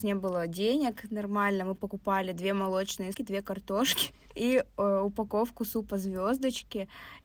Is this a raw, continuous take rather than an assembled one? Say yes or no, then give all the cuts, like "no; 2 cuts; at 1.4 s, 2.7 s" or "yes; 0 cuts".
no; 1 cut; at 3.1 s